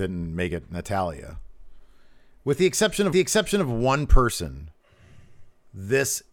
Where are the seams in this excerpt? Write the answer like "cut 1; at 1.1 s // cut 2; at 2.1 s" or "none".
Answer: cut 1; at 3.1 s